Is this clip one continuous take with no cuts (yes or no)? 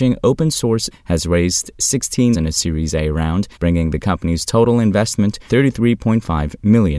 no